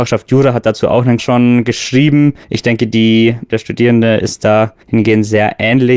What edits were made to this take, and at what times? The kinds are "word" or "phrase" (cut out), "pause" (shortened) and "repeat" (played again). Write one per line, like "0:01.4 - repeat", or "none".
0:01.2 - word
0:02.4 - pause
0:03.5 - word
0:04.8 - pause